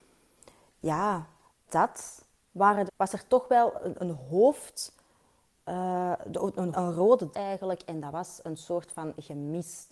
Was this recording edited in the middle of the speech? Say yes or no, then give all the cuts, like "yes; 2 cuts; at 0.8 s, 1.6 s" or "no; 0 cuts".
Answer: yes; 5 cuts; at 1.7 s, 2.9 s, 3.9 s, 6.7 s, 7.3 s